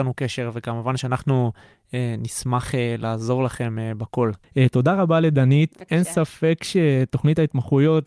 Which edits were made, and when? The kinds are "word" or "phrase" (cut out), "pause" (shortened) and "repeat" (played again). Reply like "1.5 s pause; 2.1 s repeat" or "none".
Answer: 4.4 s pause